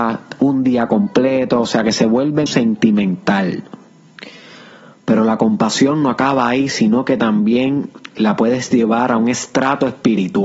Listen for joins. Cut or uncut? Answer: cut